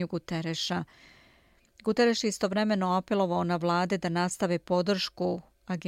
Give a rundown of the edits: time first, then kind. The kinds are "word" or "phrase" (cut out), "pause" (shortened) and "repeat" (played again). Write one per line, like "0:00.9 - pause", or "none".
none